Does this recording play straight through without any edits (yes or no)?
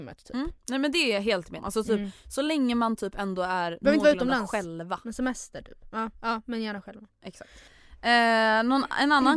no